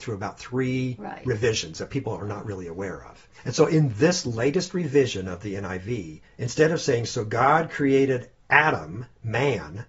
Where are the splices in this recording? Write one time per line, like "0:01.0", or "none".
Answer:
0:03.4
0:06.3